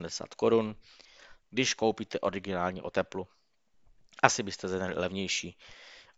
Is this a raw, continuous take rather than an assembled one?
yes; 0 cuts

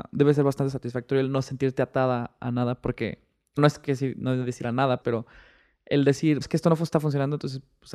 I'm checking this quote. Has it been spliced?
yes; 3 cuts; at 3.6 s, 5.0 s, 6.4 s

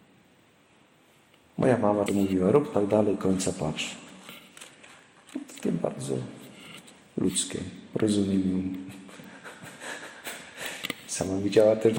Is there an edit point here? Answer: yes; 2 cuts; at 2.1 s, 5.6 s

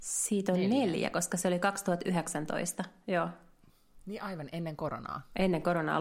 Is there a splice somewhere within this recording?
no; 0 cuts

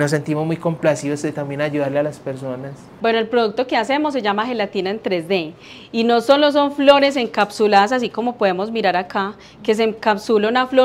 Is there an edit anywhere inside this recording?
no; 0 cuts

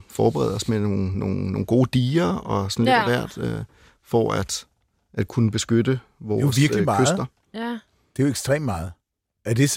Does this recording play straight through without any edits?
yes; 0 cuts

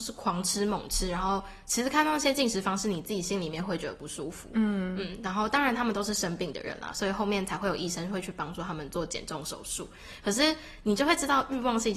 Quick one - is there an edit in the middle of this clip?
no; 0 cuts

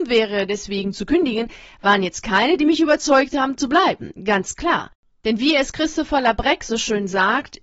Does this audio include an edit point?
no; 0 cuts

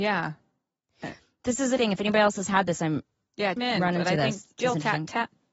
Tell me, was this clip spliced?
yes; 2 cuts; at 1.8 s, 3.6 s

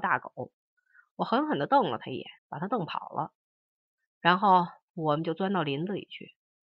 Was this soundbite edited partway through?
yes; 1 cut; at 2.4 s

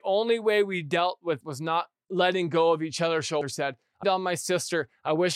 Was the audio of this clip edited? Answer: yes; 3 cuts; at 1.4 s, 3.4 s, 4.0 s

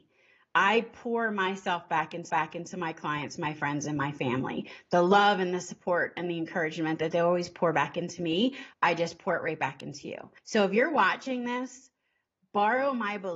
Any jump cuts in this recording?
yes; 3 cuts; at 2.3 s, 8.7 s, 10.4 s

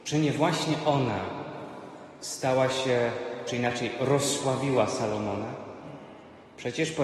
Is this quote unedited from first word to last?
yes; 0 cuts

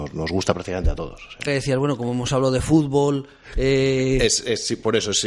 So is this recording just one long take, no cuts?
no; 1 cut; at 1.5 s

